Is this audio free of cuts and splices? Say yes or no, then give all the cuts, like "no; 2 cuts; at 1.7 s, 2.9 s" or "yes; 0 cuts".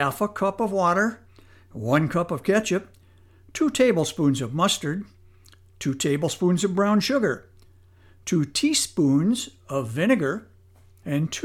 yes; 0 cuts